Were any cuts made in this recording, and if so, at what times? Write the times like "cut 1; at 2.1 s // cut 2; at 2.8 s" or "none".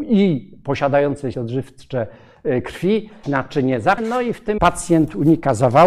cut 1; at 1.3 s // cut 2; at 3.2 s // cut 3; at 4.0 s // cut 4; at 4.6 s